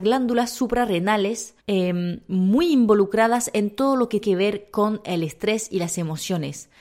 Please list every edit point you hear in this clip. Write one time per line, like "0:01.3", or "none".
0:01.6
0:04.2